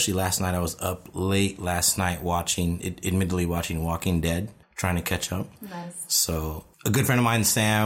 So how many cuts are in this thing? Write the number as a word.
three